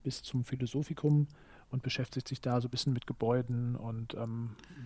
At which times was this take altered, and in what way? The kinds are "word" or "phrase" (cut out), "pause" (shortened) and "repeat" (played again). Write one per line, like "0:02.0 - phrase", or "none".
none